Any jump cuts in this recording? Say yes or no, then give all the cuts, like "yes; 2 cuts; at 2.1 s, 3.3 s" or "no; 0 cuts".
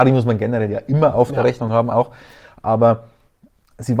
no; 0 cuts